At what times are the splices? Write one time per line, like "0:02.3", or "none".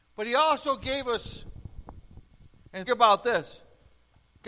0:02.9